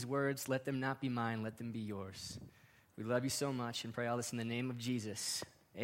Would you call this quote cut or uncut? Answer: uncut